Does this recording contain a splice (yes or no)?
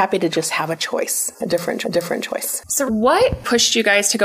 yes